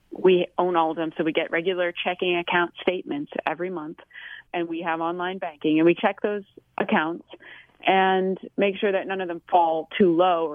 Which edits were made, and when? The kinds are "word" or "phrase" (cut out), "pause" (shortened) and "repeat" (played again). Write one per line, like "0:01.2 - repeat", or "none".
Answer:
0:04.4 - word
0:06.0 - word